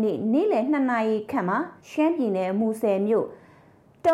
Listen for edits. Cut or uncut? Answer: cut